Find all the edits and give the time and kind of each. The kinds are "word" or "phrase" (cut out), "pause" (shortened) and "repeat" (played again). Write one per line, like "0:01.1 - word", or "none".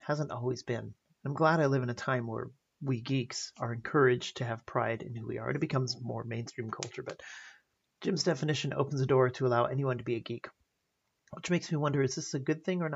none